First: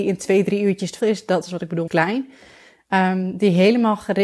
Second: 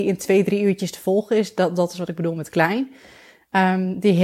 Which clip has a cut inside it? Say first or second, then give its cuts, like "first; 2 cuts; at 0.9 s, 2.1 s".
first; 3 cuts; at 1.0 s, 1.4 s, 1.9 s